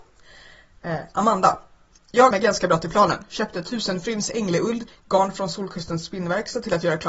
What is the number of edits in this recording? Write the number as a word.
two